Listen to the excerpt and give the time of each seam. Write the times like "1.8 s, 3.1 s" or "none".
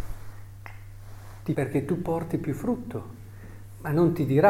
1.5 s

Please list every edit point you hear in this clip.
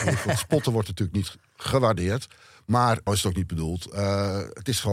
3.1 s

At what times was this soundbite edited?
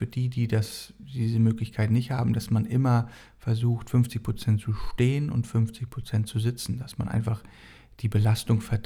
none

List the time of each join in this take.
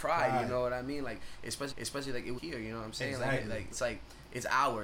1.7 s, 2.4 s, 3.7 s

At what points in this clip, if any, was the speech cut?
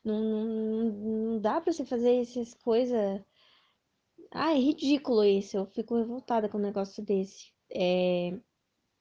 7.5 s

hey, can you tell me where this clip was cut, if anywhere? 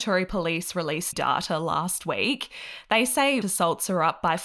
1.1 s, 3.4 s

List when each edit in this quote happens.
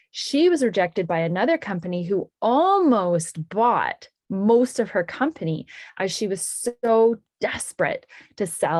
none

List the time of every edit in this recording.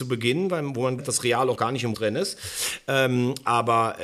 1.0 s, 1.6 s, 1.9 s

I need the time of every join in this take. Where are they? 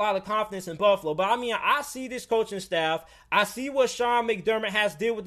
none

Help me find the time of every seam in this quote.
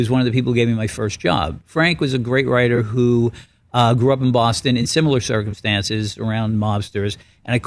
none

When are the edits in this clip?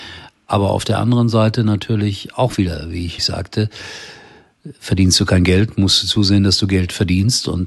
3.2 s

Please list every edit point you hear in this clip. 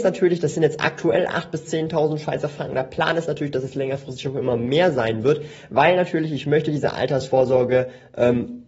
none

